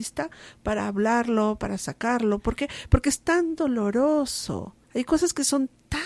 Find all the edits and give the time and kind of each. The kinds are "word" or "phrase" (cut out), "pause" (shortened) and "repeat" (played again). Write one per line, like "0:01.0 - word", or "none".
0:04.8 - pause